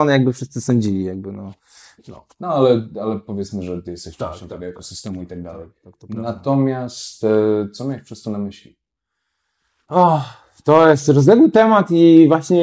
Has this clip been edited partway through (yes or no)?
no